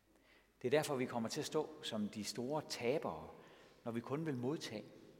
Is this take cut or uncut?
uncut